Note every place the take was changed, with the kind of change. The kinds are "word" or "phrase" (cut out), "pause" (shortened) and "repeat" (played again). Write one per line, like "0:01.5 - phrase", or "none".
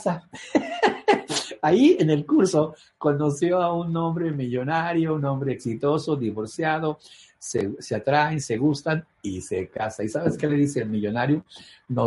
none